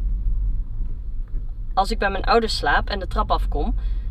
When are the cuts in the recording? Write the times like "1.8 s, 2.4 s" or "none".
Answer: none